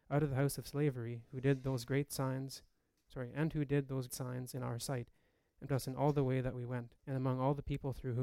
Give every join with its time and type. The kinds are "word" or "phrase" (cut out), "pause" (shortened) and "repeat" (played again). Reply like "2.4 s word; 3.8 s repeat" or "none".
4.1 s word; 5.7 s word; 7.0 s pause